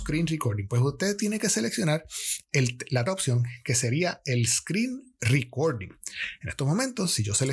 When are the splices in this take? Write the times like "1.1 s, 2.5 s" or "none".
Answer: 3.1 s